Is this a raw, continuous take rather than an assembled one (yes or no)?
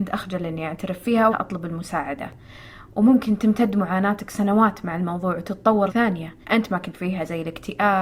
no